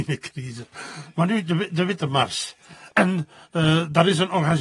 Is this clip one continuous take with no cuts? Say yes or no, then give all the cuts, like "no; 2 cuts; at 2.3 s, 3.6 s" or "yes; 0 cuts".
yes; 0 cuts